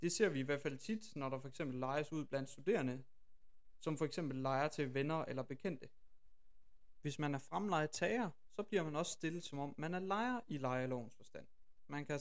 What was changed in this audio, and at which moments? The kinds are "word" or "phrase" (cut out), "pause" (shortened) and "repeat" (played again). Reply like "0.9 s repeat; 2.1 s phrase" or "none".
none